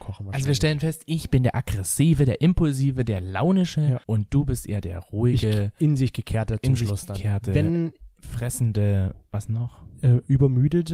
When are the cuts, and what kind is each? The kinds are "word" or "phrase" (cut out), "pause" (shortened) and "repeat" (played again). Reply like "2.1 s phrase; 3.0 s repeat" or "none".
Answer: 4.0 s pause